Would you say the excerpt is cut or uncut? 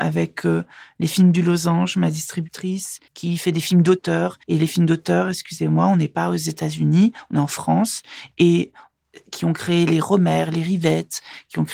cut